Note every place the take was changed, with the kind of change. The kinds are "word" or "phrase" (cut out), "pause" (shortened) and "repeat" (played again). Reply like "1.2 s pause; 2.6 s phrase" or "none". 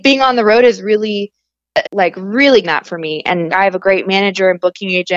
1.8 s word; 2.6 s word; 3.5 s word